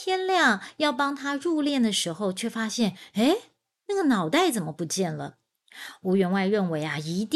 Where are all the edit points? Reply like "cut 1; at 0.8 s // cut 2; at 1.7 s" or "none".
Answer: none

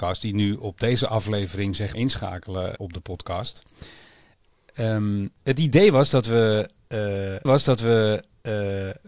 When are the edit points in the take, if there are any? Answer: cut 1; at 1.9 s // cut 2; at 2.8 s // cut 3; at 5.4 s // cut 4; at 7.5 s

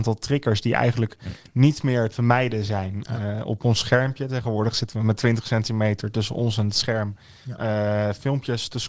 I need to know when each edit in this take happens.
cut 1; at 2.1 s

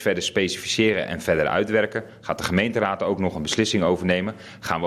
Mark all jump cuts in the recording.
none

